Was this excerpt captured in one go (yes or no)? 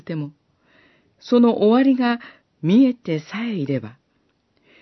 no